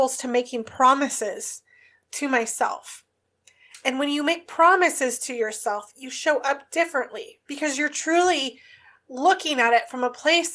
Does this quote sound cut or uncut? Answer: uncut